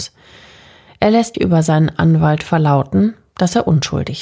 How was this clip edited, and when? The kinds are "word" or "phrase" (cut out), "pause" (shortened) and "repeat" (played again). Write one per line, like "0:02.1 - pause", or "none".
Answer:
0:01.3 - word